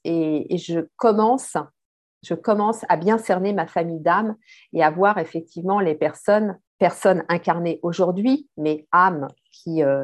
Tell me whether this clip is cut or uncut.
cut